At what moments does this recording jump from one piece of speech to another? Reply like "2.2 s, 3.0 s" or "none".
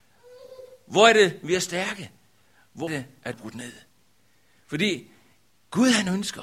2.9 s, 3.3 s